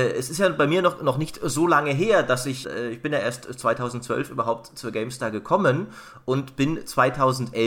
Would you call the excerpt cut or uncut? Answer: uncut